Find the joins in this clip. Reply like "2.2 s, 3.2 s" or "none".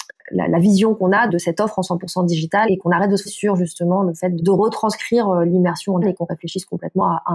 1.3 s, 2.7 s, 3.3 s, 4.4 s, 6.0 s